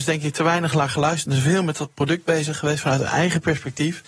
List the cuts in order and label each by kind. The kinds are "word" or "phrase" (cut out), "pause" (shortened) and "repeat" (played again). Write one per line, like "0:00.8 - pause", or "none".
none